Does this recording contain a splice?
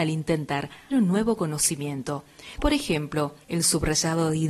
yes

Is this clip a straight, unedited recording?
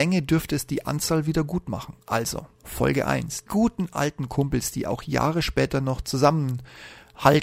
no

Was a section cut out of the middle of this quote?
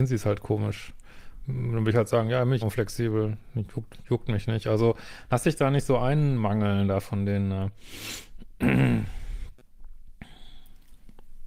yes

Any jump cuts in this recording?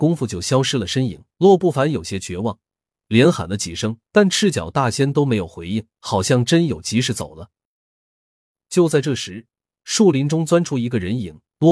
yes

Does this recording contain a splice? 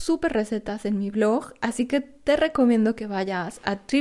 no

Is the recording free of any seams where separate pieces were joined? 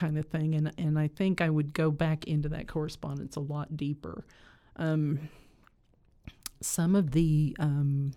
yes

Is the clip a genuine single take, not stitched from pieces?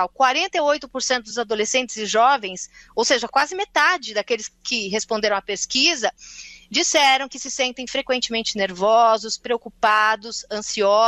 yes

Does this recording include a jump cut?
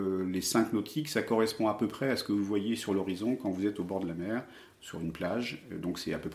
no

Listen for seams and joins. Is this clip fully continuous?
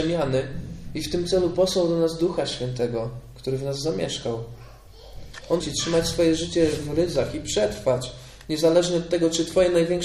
no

